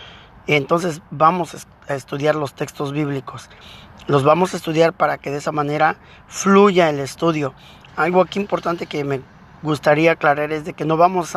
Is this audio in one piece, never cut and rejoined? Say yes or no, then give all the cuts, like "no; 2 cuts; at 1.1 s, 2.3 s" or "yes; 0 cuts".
yes; 0 cuts